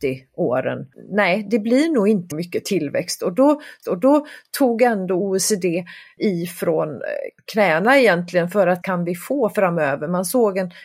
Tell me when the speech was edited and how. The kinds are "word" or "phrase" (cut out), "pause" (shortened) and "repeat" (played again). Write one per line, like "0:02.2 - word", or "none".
0:02.3 - word
0:03.8 - repeat
0:07.4 - pause
0:08.8 - phrase